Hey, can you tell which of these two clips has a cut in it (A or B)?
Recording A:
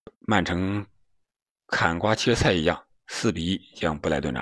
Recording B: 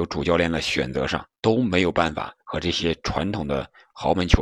B